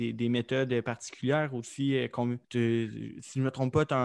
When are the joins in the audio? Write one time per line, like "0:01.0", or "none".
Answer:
0:02.4